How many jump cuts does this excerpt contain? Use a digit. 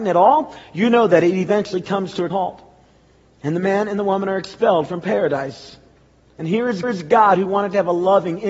2